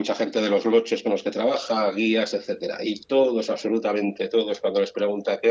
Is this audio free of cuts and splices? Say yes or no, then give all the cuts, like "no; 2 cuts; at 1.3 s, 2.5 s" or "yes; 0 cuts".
yes; 0 cuts